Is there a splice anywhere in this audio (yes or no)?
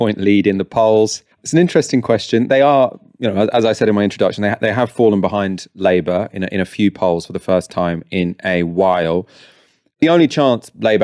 yes